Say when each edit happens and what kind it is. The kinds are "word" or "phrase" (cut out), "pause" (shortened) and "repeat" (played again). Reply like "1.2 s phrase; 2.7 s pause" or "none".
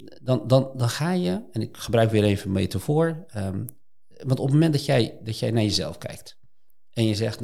none